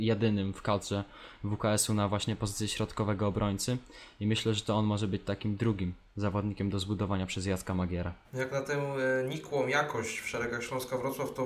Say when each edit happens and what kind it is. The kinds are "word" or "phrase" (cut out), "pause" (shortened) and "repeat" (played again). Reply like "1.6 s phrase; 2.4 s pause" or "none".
8.2 s pause